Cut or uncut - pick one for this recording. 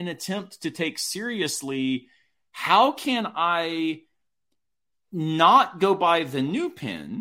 uncut